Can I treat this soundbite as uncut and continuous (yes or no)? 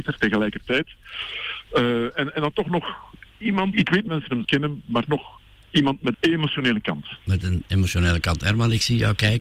no